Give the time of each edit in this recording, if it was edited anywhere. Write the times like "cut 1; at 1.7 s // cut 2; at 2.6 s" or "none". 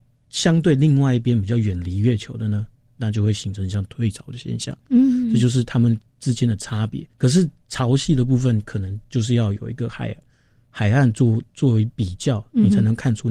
cut 1; at 7.1 s